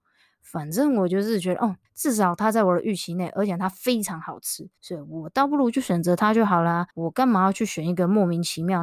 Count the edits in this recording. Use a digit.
3